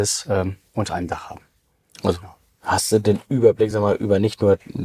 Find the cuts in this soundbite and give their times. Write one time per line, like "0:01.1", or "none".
none